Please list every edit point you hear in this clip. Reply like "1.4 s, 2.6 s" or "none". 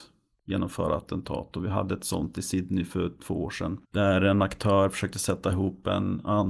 3.8 s